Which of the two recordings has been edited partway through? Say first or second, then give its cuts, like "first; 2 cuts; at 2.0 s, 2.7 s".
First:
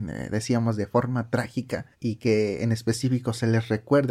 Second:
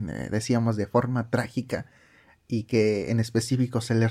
first; 1 cut; at 1.9 s